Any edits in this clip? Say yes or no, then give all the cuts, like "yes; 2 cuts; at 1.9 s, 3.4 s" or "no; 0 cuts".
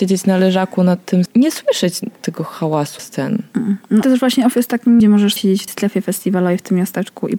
yes; 7 cuts; at 1.3 s, 2.0 s, 3.0 s, 4.0 s, 5.0 s, 5.4 s, 5.7 s